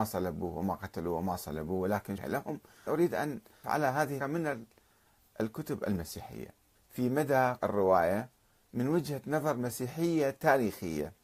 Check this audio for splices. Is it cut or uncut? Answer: cut